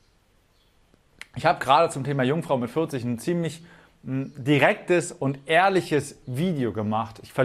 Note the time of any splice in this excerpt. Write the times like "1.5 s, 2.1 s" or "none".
none